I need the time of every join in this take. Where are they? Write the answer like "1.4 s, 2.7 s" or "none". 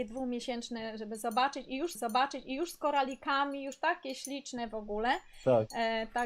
2.0 s